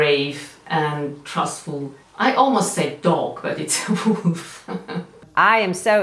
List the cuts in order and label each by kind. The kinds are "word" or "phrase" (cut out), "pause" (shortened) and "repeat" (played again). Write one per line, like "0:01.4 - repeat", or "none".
none